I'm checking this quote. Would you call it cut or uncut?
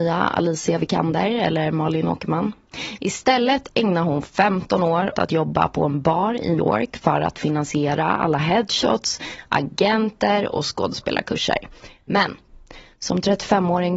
cut